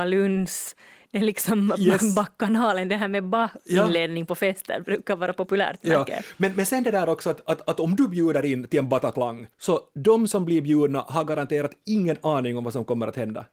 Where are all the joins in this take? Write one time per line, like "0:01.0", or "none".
0:09.5